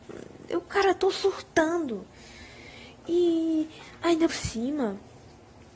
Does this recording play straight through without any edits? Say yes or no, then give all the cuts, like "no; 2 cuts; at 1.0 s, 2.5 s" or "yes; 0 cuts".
no; 1 cut; at 4.3 s